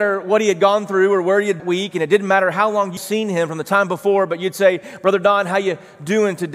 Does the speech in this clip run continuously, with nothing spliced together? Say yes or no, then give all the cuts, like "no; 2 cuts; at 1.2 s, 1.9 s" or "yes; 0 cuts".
no; 2 cuts; at 1.6 s, 3.0 s